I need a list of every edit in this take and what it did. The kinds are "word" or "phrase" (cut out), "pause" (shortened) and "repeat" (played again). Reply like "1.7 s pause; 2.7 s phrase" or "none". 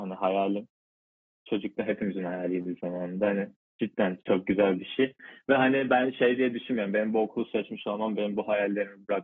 none